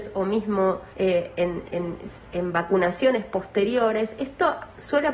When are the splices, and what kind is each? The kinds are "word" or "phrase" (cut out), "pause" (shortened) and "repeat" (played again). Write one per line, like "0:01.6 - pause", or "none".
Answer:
0:00.9 - pause

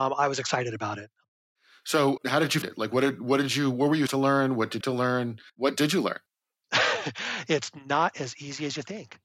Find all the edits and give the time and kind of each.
0:02.2 - word
0:02.6 - word
0:04.1 - word
0:04.8 - phrase
0:05.5 - pause
0:06.3 - pause

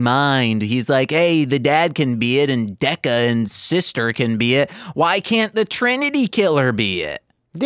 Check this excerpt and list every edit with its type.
none

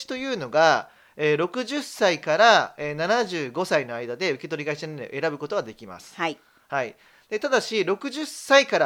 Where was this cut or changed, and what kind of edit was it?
none

